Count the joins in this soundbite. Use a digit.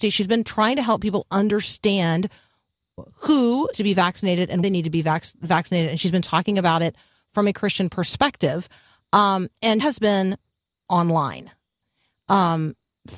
4